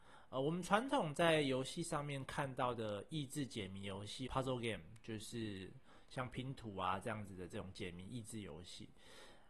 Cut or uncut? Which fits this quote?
cut